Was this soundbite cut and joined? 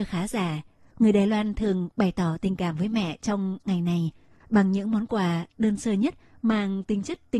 no; 0 cuts

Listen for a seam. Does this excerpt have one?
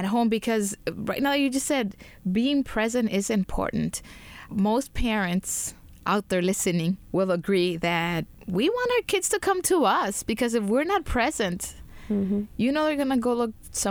no; 0 cuts

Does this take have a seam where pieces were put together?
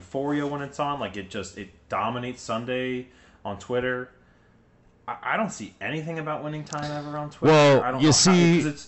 no; 0 cuts

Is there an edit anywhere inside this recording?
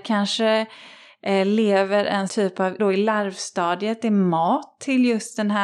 yes; 2 cuts; at 2.3 s, 2.8 s

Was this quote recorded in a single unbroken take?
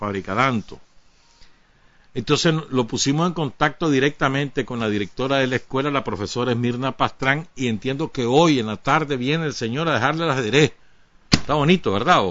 yes; 0 cuts

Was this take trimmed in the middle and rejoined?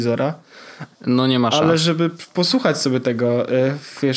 no; 0 cuts

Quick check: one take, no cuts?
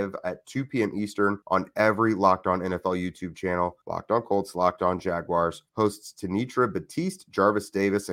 no; 3 cuts; at 1.4 s, 3.8 s, 5.7 s

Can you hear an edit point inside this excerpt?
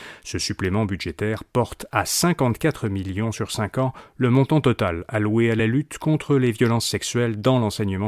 no; 0 cuts

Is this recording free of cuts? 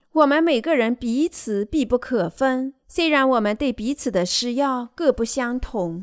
no; 1 cut; at 2.8 s

